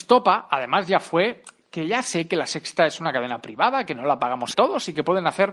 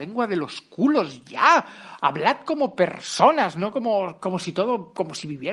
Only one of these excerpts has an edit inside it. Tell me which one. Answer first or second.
first